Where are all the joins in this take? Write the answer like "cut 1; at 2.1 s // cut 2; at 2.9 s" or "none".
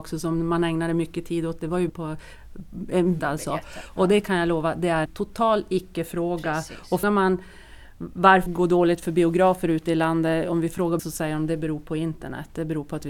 cut 1; at 1.9 s // cut 2; at 3.2 s // cut 3; at 5.1 s // cut 4; at 7.0 s // cut 5; at 8.5 s // cut 6; at 11.0 s